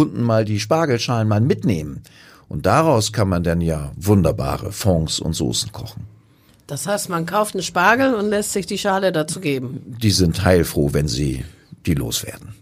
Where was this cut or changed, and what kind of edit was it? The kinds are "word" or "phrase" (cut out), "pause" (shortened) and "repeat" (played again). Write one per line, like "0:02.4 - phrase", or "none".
0:06.5 - pause
0:07.5 - word